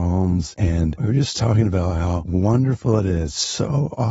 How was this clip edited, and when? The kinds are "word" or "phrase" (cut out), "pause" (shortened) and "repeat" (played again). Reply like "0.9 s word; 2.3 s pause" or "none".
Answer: none